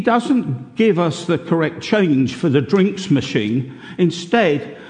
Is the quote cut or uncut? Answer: uncut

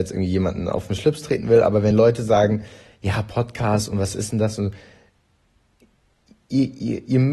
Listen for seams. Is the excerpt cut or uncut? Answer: uncut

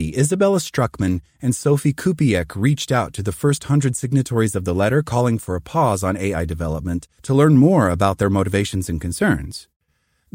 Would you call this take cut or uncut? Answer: cut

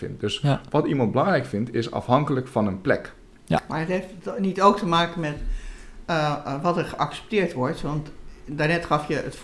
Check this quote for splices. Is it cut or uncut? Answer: uncut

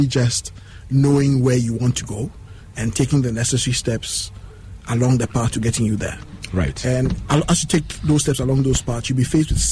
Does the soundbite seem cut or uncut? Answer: uncut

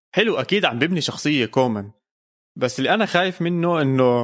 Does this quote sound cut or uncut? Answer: uncut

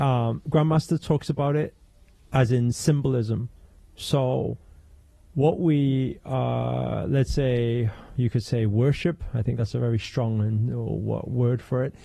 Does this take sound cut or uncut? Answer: uncut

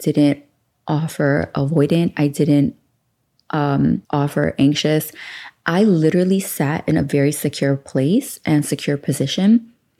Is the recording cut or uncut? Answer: cut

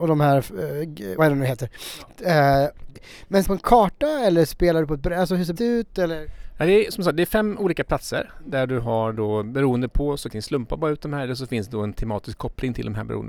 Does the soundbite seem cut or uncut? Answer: cut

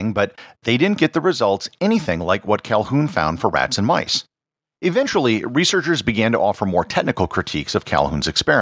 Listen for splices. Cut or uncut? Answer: uncut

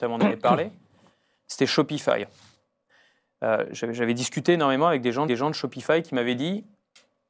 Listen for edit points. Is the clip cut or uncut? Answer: cut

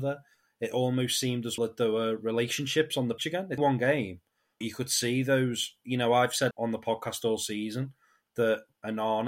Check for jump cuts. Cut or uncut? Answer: cut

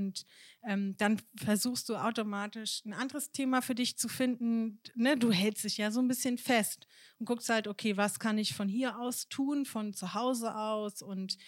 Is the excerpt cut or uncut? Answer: uncut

